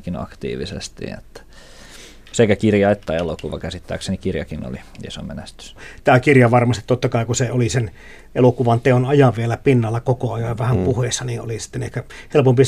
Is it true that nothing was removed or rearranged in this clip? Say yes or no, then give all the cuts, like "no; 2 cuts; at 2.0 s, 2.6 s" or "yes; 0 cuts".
yes; 0 cuts